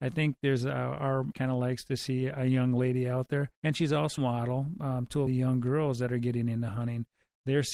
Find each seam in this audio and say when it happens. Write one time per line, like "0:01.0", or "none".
0:01.3
0:03.5
0:04.2
0:05.3